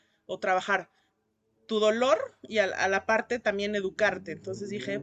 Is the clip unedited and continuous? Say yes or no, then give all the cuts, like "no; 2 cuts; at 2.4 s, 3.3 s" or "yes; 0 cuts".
yes; 0 cuts